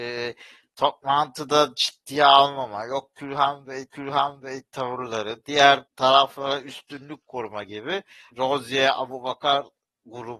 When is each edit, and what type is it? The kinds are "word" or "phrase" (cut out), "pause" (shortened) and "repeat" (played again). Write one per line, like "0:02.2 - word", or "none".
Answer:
0:03.9 - repeat
0:05.9 - pause
0:08.3 - word